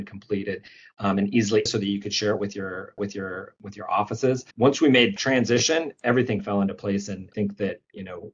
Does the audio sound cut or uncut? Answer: cut